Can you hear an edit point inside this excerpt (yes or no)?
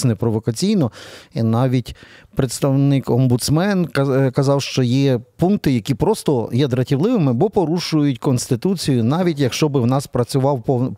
no